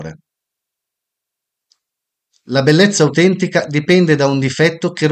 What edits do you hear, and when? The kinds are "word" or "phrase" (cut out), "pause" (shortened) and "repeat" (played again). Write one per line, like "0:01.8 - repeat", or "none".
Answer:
none